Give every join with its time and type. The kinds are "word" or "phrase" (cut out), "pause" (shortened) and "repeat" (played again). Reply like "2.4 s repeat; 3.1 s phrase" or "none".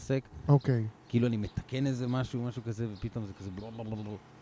none